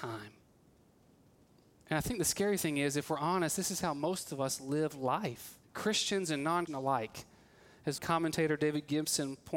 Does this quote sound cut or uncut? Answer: cut